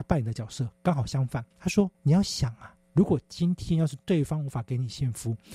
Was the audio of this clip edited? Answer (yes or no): yes